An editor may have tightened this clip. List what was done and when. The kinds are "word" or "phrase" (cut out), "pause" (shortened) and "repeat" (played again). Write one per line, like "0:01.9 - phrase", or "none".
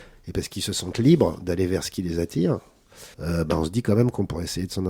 0:03.1 - pause